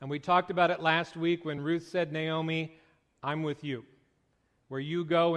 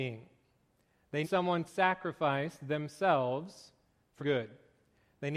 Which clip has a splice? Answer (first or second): second